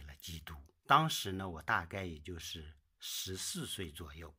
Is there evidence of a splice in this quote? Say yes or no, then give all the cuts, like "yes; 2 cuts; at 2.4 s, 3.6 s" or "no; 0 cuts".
no; 0 cuts